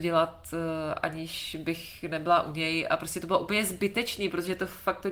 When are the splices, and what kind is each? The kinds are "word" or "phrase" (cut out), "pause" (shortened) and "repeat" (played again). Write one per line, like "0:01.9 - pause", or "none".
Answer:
none

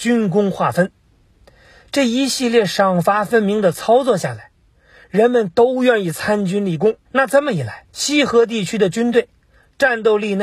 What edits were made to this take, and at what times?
0:07.1 - pause
0:07.9 - pause

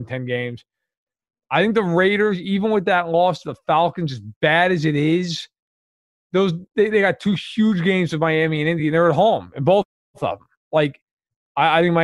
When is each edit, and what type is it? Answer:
none

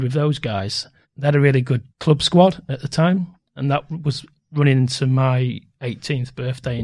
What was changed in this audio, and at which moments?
0:01.0 - pause
0:01.9 - pause
0:03.5 - pause

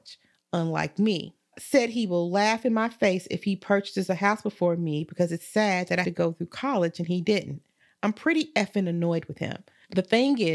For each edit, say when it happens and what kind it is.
0:06.0 - word
0:07.8 - pause

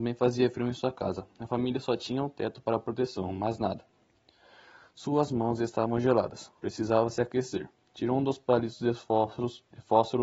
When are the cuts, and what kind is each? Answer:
none

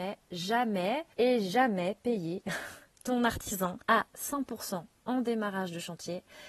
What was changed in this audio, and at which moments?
0:01.1 - pause
0:03.8 - pause

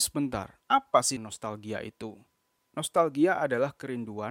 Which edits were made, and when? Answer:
0:01.2 - word

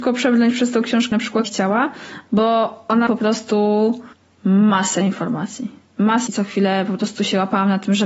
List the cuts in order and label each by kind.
0:01.1 - word
0:01.4 - word
0:03.1 - phrase
0:04.1 - pause
0:06.3 - word

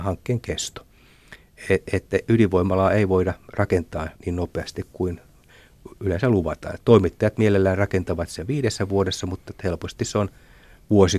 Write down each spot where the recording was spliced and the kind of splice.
0:04.2 - pause

